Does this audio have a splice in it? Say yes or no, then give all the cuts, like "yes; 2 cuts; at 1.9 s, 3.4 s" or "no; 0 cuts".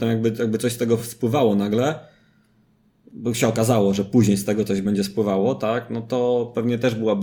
no; 0 cuts